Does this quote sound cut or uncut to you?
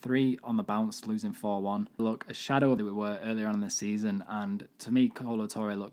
cut